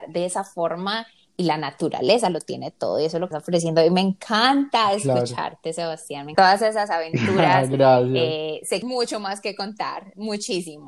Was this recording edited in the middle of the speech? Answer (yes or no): yes